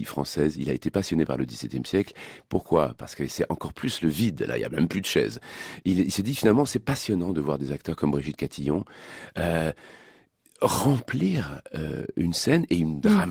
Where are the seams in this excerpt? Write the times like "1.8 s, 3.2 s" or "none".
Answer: none

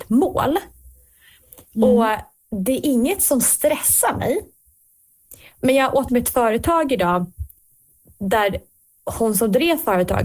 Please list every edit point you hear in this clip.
6.1 s

